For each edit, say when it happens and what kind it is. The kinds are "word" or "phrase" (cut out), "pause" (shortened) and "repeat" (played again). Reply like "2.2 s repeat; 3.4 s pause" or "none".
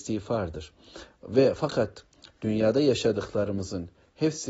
none